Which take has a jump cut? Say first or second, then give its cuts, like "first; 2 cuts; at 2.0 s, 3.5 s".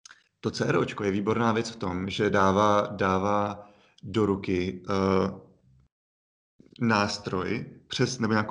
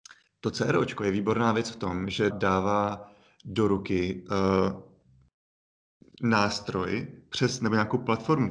second; 1 cut; at 2.3 s